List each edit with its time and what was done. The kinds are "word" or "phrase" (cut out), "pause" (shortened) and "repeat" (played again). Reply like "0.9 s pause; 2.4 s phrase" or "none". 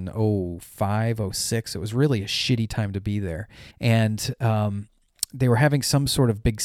3.7 s pause